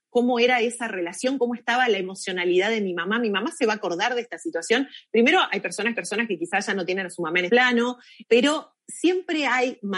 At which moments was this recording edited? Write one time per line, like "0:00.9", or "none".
0:05.9
0:07.5
0:08.2